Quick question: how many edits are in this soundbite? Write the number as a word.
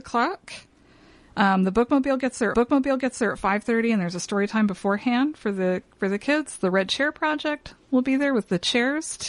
one